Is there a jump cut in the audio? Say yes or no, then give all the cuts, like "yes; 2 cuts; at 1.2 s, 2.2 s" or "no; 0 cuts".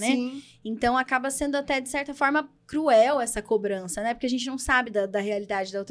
no; 0 cuts